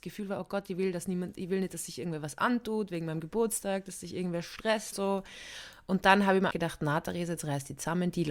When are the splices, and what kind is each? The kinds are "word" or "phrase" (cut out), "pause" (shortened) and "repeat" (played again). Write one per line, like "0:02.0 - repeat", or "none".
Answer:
0:04.9 - word
0:06.5 - word